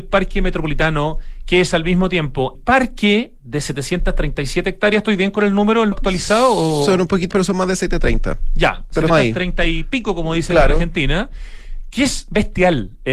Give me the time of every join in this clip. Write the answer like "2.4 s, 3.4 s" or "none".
2.5 s, 5.9 s, 7.3 s, 9.1 s